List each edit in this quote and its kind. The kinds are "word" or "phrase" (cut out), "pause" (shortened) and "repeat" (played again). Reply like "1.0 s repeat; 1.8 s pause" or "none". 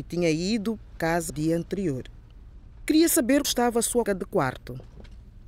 0.9 s word; 1.3 s word; 3.4 s word; 4.1 s word